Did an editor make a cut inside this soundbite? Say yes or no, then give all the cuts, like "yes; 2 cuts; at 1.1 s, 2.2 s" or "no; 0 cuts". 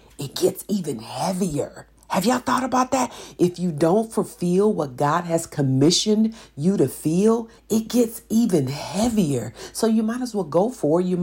yes; 2 cuts; at 2.0 s, 7.6 s